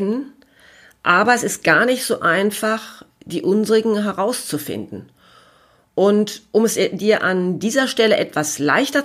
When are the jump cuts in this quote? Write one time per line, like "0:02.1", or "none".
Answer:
none